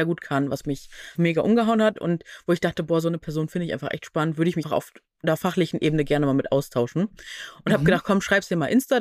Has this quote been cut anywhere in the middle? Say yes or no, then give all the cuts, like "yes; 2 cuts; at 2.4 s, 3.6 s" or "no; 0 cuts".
yes; 2 cuts; at 1.2 s, 4.6 s